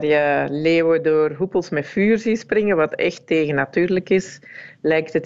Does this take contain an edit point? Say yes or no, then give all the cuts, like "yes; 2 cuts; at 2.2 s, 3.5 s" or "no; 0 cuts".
no; 0 cuts